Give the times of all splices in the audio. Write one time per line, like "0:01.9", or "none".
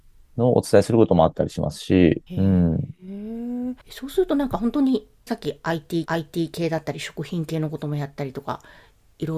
0:02.3
0:03.8
0:05.3
0:06.1